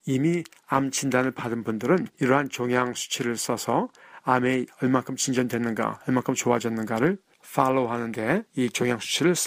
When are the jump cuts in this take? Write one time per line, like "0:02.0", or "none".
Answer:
0:02.1
0:08.5